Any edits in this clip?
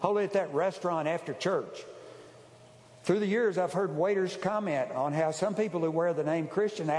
no; 0 cuts

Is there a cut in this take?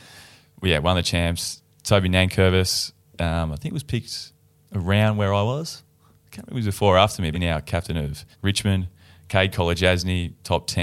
yes; 2 cuts; at 7.3 s, 8.3 s

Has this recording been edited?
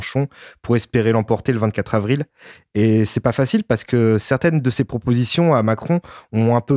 no; 0 cuts

